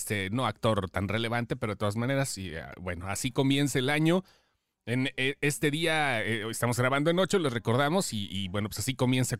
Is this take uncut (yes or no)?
yes